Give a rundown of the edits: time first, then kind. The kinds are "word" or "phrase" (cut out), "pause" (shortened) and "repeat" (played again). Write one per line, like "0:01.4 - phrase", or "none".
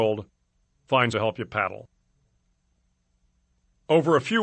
0:01.1 - word